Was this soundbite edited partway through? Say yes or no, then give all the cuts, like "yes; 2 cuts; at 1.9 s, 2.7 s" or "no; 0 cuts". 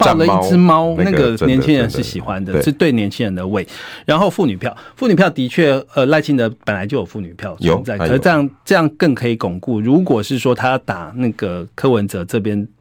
yes; 2 cuts; at 1.0 s, 5.9 s